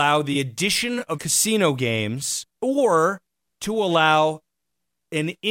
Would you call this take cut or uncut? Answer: cut